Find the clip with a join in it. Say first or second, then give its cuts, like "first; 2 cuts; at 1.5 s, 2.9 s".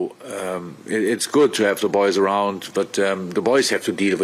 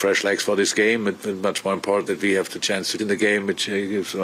second; 2 cuts; at 2.1 s, 3.0 s